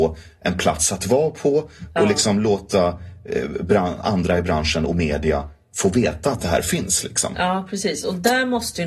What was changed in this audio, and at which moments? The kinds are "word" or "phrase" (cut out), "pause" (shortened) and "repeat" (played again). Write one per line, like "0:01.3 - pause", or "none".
none